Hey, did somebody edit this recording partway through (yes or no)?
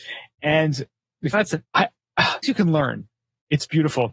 yes